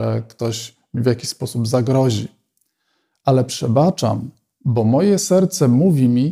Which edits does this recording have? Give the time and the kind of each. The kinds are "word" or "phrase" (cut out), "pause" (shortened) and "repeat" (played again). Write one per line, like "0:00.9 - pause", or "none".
none